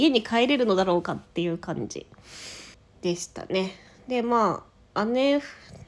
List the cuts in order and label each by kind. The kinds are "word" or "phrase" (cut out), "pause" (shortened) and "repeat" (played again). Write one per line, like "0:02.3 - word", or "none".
0:02.7 - pause